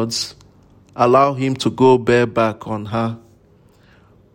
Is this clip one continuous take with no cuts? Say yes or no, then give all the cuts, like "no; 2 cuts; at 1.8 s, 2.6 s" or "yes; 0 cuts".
yes; 0 cuts